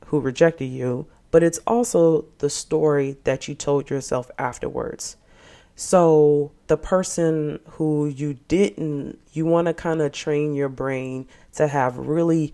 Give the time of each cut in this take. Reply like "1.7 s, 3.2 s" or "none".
6.7 s, 9.2 s